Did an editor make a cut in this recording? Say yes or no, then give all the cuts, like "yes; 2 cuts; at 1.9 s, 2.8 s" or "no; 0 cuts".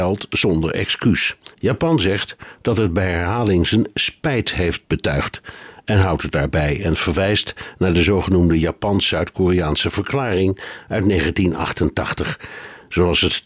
yes; 1 cut; at 1.5 s